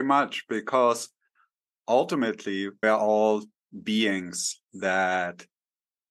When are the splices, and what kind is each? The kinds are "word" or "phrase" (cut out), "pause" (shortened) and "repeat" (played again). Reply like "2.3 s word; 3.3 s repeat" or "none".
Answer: 2.8 s word